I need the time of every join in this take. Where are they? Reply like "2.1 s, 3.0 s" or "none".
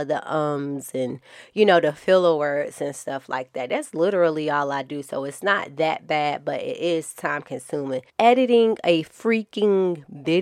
none